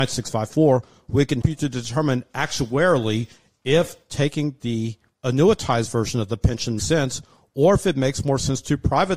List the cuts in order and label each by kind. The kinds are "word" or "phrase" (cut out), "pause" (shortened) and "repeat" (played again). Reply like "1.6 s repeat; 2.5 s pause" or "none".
1.4 s word; 5.1 s pause; 6.8 s word